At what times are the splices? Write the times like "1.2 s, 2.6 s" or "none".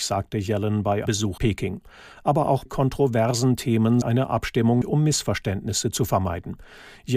1.1 s, 1.4 s, 2.7 s, 4.0 s, 4.8 s